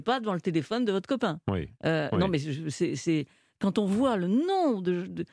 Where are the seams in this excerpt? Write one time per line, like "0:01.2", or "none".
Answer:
0:01.8